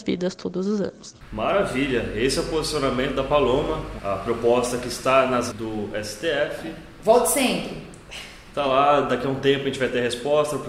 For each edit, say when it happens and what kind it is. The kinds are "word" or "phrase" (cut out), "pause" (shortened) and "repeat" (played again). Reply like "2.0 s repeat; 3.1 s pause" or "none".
4.0 s word; 5.5 s word